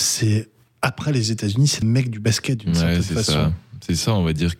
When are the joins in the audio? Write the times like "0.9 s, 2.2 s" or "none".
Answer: 1.8 s